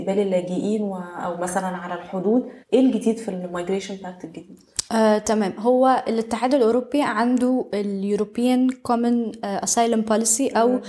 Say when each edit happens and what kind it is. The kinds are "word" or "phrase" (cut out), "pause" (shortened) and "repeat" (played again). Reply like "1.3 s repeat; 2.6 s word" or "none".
2.6 s pause; 4.9 s pause